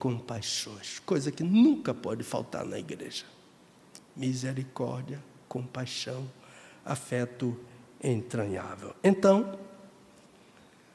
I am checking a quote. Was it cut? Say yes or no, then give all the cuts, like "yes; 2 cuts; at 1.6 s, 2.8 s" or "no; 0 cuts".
no; 0 cuts